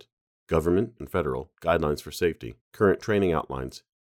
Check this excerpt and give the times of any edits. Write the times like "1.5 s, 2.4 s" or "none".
1.0 s, 2.6 s

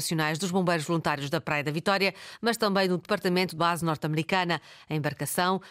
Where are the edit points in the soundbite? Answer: 3.6 s

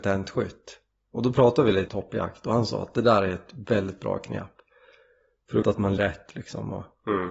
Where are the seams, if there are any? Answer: 1.9 s, 5.6 s, 6.0 s

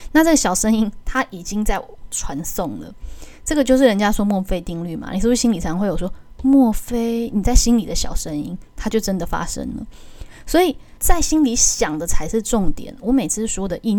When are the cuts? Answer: 11.0 s

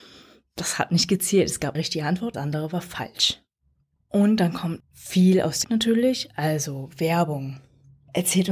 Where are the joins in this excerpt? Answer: 1.7 s, 2.3 s, 4.8 s, 5.6 s

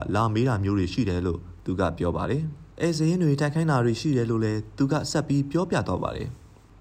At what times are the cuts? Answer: 2.7 s

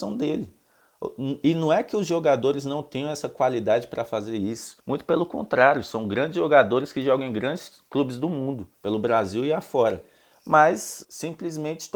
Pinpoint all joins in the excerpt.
4.8 s, 8.7 s, 11.0 s

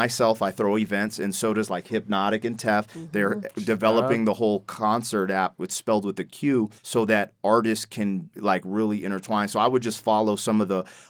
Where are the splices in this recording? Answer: 6.8 s

